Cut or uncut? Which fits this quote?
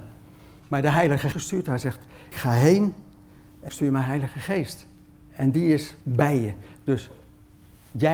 cut